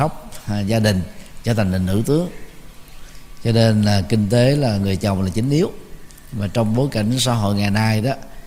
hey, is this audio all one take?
yes; 0 cuts

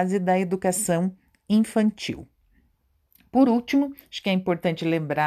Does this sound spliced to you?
no; 0 cuts

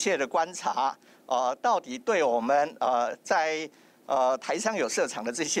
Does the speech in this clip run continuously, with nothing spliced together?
yes; 0 cuts

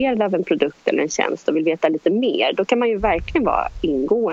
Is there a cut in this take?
no; 0 cuts

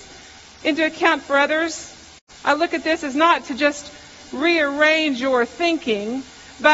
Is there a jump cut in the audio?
yes; 1 cut; at 2.2 s

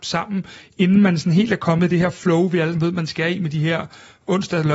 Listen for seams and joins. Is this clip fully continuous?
no; 1 cut; at 2.7 s

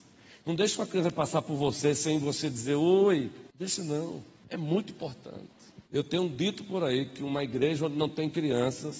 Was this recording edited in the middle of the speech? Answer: yes; 3 cuts; at 3.5 s, 4.4 s, 5.9 s

